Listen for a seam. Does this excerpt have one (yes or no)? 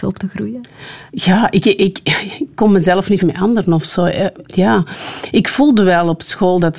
yes